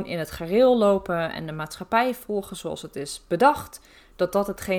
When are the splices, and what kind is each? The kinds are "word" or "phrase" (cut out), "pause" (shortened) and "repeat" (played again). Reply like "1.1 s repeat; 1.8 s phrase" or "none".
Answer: none